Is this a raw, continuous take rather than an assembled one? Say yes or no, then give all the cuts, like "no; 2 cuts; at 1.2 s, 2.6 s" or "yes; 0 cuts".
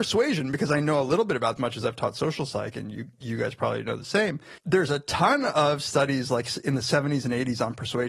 no; 2 cuts; at 1.6 s, 4.6 s